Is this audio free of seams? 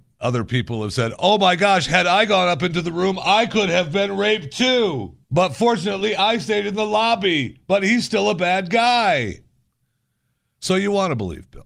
no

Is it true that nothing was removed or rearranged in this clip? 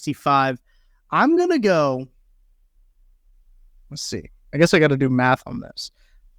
yes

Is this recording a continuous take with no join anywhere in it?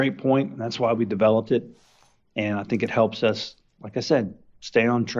yes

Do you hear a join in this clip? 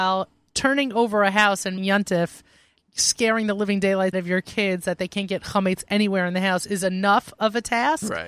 yes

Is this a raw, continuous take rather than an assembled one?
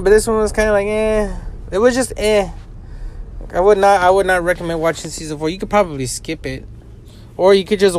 yes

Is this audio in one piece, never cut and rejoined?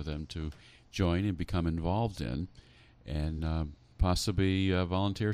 yes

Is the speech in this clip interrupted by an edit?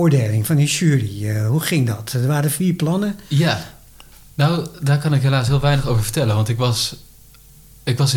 no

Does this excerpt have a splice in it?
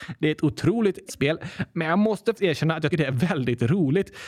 yes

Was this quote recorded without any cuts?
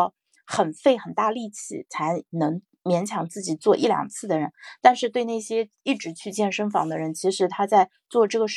yes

